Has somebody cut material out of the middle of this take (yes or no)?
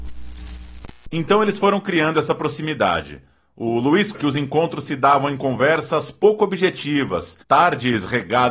yes